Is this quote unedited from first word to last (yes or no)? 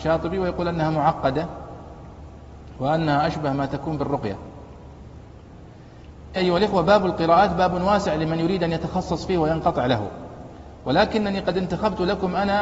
no